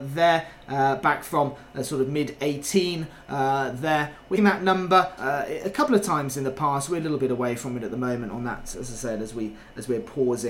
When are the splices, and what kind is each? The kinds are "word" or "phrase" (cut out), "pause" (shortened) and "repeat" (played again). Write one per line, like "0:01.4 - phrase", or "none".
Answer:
0:04.4 - word
0:05.2 - word
0:08.7 - word